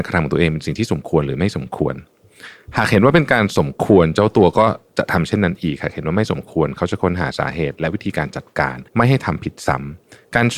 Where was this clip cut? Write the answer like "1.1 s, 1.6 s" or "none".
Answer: 8.9 s